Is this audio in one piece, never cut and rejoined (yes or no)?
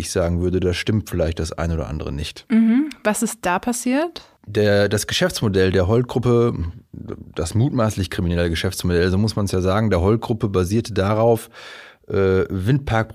yes